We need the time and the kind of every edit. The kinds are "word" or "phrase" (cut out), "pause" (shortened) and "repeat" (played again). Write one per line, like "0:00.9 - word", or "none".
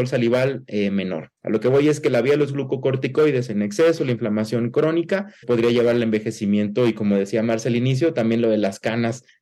0:01.4 - pause
0:05.4 - word